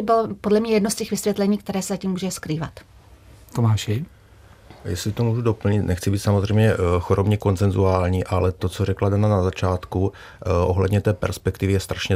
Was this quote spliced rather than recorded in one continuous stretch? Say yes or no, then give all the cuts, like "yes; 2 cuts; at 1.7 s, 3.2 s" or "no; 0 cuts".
no; 0 cuts